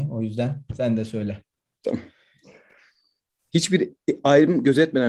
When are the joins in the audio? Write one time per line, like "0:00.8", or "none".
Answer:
none

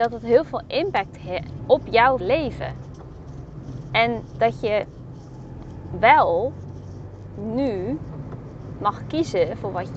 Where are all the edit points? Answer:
0:01.6
0:02.2

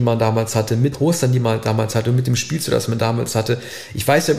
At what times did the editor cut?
0:00.9

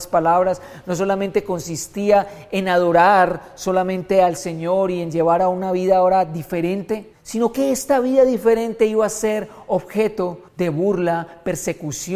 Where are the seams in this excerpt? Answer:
0:07.1
0:10.5

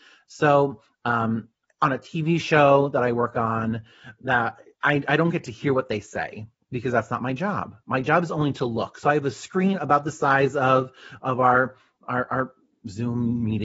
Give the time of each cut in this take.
0:01.5

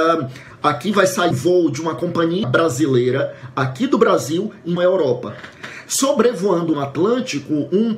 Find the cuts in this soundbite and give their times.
0:01.3
0:02.4
0:04.8
0:06.7

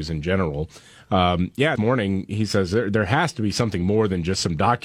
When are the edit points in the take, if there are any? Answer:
0:01.8

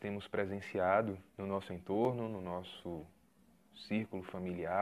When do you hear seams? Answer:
0:01.3

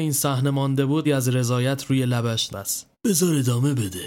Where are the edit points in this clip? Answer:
0:01.0
0:02.5
0:02.9

